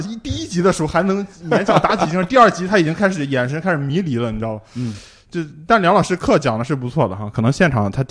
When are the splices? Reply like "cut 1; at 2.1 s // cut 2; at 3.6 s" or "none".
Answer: none